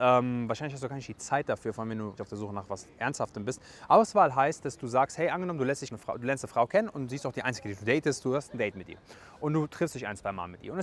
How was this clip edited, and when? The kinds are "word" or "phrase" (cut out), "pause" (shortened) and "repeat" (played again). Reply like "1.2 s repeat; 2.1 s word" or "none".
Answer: 2.2 s word; 5.9 s phrase

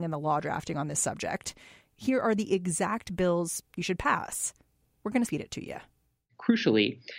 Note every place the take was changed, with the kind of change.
5.3 s word

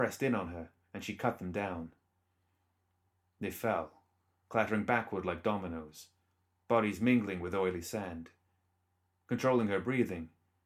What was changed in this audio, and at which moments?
none

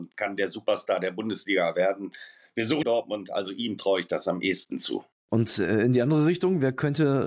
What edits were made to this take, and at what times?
2.8 s phrase

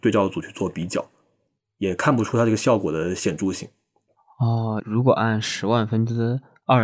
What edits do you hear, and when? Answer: 4.8 s phrase

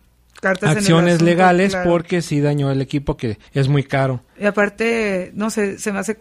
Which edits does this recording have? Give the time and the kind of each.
3.5 s pause; 4.3 s pause

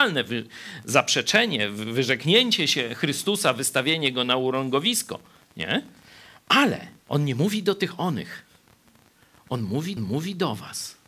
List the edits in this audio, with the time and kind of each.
5.4 s pause; 7.0 s pause; 10.0 s repeat

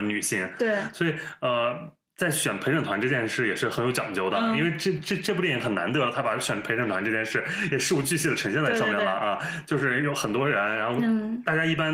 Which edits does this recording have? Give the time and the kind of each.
none

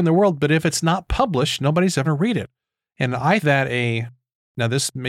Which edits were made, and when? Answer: 2.0 s word; 3.4 s word

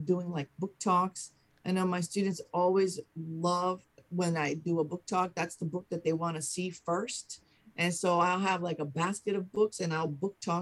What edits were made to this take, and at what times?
4.0 s pause

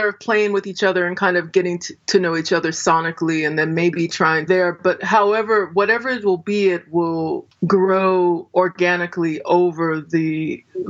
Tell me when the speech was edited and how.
4.5 s phrase

